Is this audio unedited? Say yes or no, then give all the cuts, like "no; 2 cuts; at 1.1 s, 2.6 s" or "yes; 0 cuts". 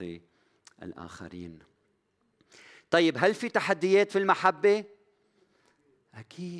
yes; 0 cuts